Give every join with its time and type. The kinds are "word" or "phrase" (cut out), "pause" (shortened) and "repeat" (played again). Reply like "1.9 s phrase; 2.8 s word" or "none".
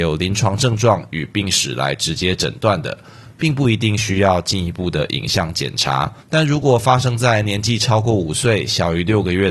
6.2 s pause